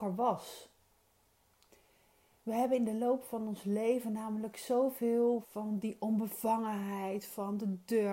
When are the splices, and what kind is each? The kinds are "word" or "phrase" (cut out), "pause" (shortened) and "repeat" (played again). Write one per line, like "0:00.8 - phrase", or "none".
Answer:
0:05.4 - word